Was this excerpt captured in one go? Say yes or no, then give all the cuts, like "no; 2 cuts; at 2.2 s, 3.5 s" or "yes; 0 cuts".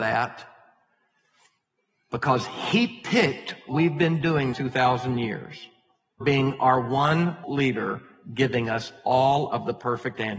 no; 4 cuts; at 3.7 s, 4.5 s, 6.2 s, 7.4 s